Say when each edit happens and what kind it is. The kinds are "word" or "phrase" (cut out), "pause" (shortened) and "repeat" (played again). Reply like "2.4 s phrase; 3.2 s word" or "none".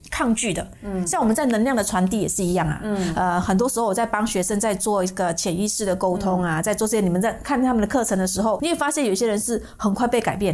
8.6 s word